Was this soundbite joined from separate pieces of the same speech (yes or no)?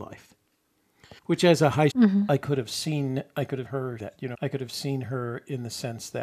yes